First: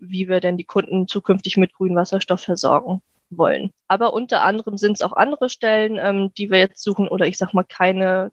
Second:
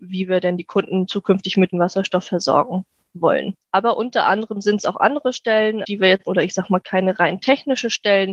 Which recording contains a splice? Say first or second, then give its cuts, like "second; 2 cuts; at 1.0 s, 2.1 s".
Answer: second; 4 cuts; at 1.7 s, 5.8 s, 6.3 s, 6.8 s